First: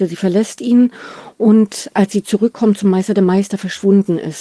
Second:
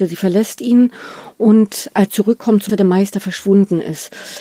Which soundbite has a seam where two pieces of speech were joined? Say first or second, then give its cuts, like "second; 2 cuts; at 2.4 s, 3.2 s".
second; 2 cuts; at 2.1 s, 2.7 s